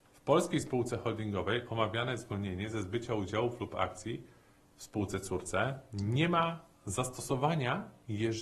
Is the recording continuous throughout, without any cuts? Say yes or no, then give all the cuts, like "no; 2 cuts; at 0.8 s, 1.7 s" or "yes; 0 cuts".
yes; 0 cuts